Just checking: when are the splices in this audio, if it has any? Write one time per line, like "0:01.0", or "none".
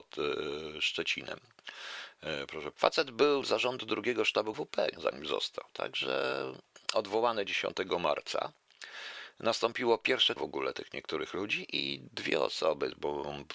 0:02.7
0:03.4
0:04.5
0:04.9
0:10.4